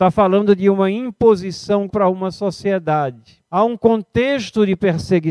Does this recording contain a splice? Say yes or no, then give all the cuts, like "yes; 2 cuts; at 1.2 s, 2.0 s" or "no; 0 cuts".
yes; 2 cuts; at 1.9 s, 3.4 s